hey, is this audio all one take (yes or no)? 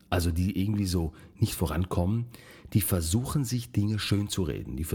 yes